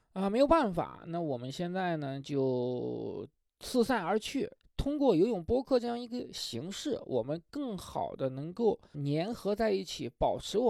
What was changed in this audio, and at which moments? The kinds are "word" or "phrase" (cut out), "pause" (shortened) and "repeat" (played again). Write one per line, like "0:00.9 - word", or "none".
0:03.4 - pause
0:04.6 - pause
0:08.9 - word